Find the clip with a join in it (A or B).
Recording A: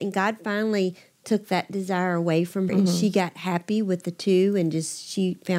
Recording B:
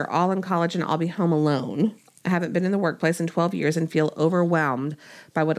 A